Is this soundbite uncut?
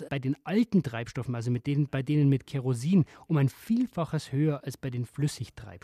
yes; 0 cuts

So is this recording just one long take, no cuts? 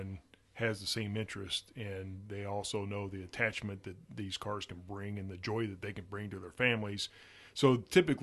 yes; 0 cuts

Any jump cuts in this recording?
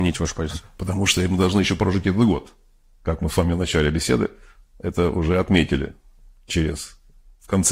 no; 0 cuts

